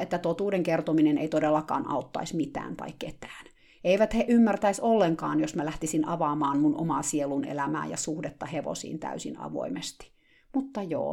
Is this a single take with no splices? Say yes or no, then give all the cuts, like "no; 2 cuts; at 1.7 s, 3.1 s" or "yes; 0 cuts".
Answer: yes; 0 cuts